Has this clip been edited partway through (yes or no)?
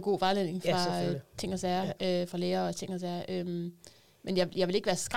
no